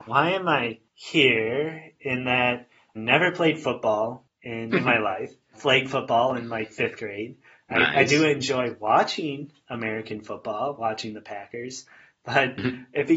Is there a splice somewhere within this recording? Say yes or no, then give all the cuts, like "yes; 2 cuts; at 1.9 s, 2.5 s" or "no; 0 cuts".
yes; 3 cuts; at 2.9 s, 4.7 s, 5.5 s